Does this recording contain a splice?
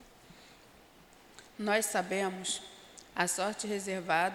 yes; 1 cut; at 3.1 s

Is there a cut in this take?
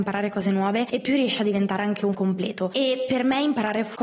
yes; 1 cut; at 2.1 s

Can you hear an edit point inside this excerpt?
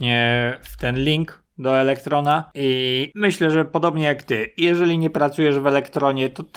no; 0 cuts

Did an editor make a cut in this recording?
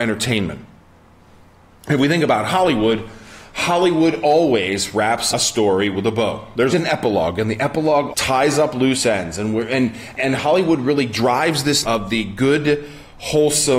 yes; 5 cuts; at 5.3 s, 6.7 s, 8.1 s, 10.2 s, 11.8 s

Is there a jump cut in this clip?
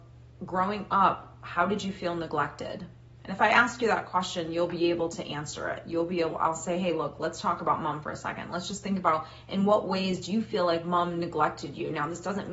no; 0 cuts

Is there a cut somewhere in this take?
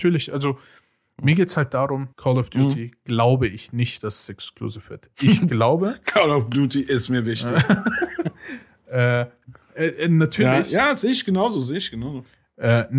yes; 1 cut; at 2.1 s

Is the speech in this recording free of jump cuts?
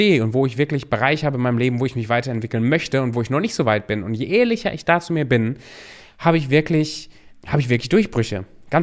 no; 1 cut; at 7.3 s

